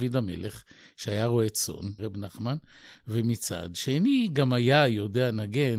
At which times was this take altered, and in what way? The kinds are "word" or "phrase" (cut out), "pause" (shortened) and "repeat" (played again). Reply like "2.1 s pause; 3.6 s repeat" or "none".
2.0 s word